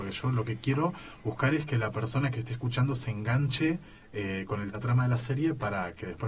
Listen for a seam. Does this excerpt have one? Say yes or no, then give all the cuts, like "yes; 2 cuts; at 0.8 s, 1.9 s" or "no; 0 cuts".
yes; 1 cut; at 4.7 s